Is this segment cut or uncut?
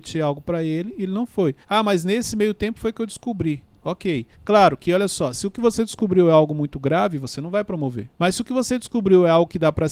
cut